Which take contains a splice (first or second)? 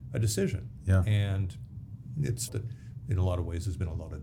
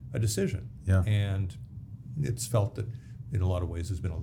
first